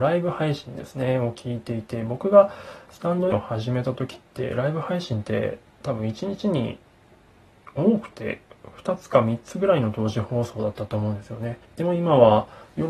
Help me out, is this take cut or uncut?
cut